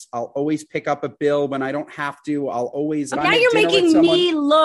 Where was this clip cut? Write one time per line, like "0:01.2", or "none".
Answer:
0:03.1